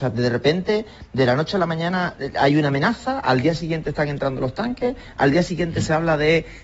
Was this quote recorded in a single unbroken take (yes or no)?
yes